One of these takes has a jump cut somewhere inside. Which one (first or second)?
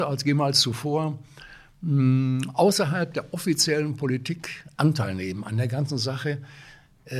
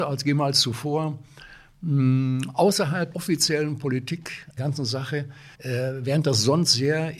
second